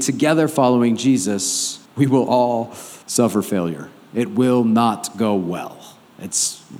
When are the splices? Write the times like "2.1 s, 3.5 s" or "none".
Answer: 1.9 s, 3.0 s